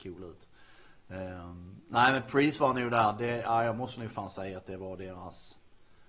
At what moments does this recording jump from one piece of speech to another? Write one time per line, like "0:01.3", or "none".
none

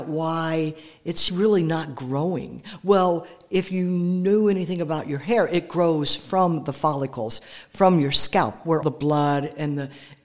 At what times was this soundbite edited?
0:01.3
0:08.8

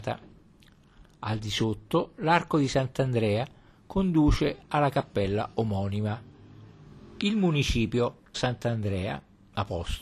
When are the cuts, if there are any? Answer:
0:08.3

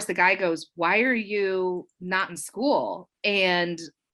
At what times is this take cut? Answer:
none

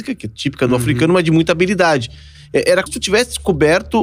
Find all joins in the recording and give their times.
0:02.9

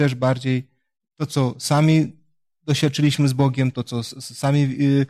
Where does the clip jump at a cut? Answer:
none

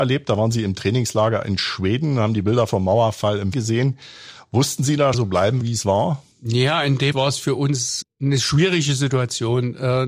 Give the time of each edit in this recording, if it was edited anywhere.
0:03.5
0:05.1
0:05.6
0:06.3
0:07.1
0:08.0

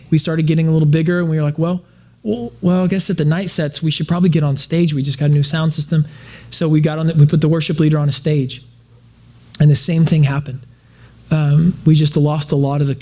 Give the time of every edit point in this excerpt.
none

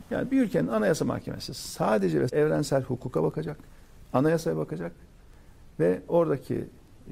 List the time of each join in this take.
0:02.3

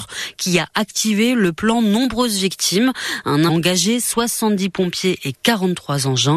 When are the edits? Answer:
0:03.5

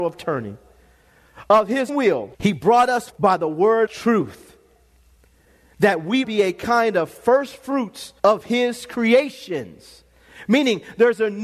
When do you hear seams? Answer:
0:01.9
0:02.3
0:03.1
0:03.9
0:06.2
0:08.2

